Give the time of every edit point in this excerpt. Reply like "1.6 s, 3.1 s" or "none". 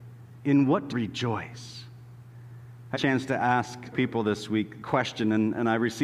0.9 s, 3.0 s, 3.9 s, 4.8 s